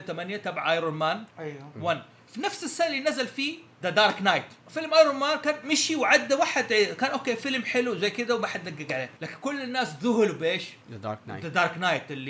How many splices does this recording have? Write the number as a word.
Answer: four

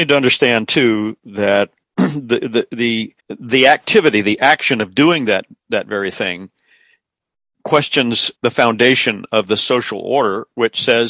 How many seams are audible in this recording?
two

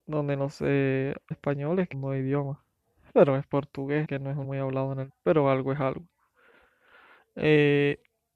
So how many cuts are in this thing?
five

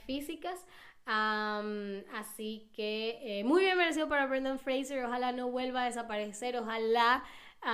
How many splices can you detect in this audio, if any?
zero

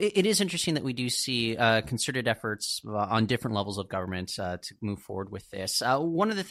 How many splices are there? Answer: zero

